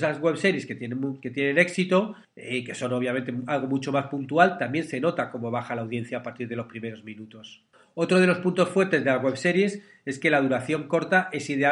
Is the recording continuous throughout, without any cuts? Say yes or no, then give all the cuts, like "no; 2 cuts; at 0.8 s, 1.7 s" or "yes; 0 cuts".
yes; 0 cuts